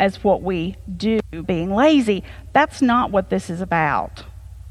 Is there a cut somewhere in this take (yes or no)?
yes